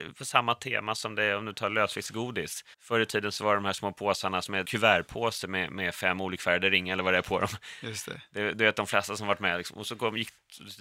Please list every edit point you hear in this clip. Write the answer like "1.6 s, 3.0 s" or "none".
2.7 s, 4.6 s